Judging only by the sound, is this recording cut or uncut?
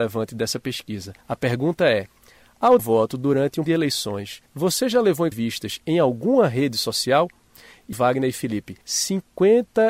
cut